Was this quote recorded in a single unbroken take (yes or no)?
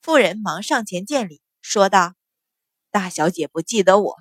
no